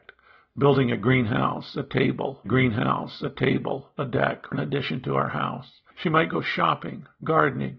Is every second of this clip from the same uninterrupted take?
no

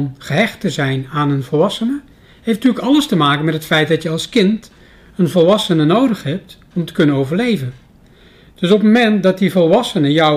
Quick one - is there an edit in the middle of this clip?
no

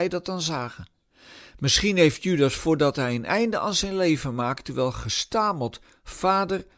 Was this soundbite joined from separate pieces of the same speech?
no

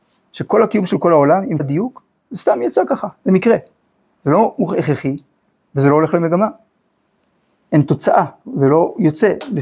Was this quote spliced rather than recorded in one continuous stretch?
yes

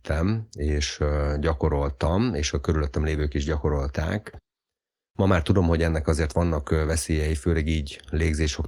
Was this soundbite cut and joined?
no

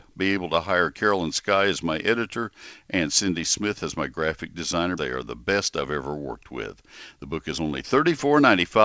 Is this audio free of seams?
no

